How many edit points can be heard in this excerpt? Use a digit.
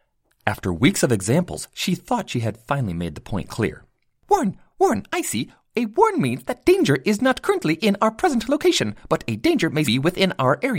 1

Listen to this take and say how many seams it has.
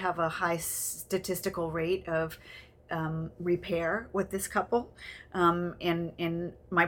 0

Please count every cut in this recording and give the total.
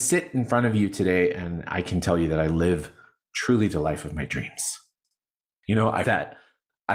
1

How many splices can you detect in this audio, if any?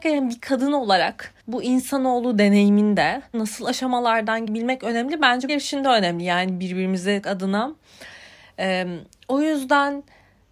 5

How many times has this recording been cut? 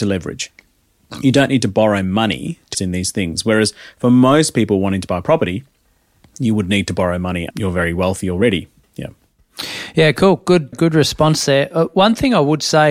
3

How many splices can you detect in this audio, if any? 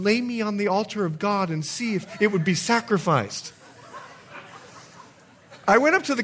0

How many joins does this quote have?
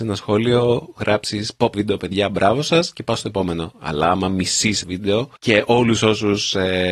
3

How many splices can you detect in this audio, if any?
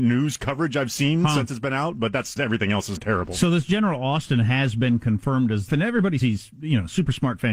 4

